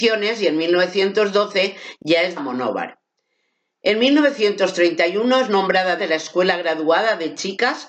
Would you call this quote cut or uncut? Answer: cut